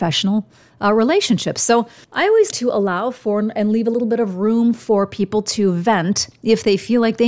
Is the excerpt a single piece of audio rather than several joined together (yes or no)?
no